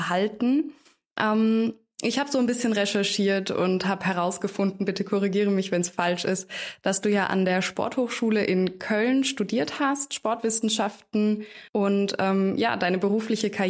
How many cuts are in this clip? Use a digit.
1